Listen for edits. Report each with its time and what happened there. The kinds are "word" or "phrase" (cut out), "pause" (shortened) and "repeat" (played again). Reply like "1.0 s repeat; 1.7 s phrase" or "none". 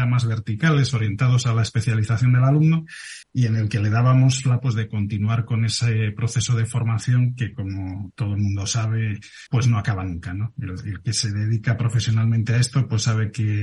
3.2 s pause; 4.6 s word; 9.5 s pause